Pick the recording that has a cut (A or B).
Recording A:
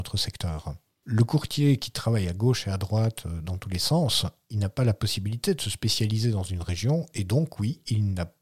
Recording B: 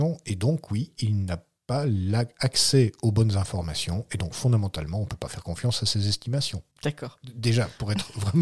B